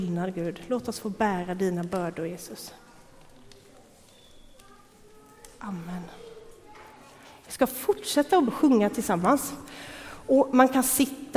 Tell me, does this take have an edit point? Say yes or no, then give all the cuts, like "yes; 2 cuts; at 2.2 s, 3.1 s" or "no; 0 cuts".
yes; 1 cut; at 8.5 s